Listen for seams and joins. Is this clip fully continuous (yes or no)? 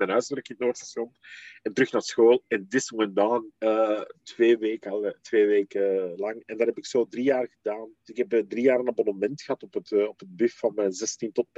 no